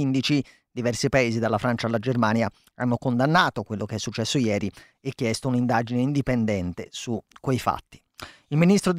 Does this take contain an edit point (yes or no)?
no